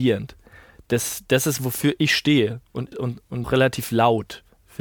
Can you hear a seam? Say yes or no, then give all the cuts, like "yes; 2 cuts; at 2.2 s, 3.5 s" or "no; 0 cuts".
yes; 3 cuts; at 1.6 s, 2.9 s, 3.4 s